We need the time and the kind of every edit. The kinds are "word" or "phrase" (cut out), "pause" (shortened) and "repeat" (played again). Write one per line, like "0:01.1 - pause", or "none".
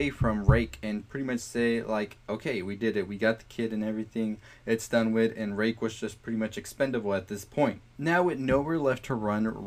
none